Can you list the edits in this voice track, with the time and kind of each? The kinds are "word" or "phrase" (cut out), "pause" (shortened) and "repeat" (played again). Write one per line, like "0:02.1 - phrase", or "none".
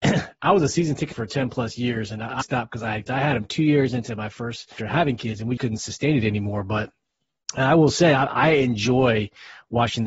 0:01.1 - word
0:02.4 - word
0:03.1 - word
0:04.8 - word
0:05.6 - word